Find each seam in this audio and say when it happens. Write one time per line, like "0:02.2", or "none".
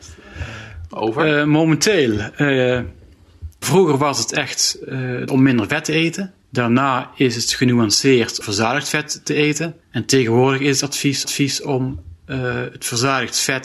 0:03.6
0:05.3
0:06.4
0:08.4
0:09.8
0:11.2